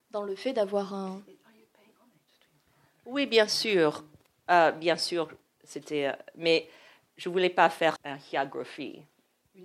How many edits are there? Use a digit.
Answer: 1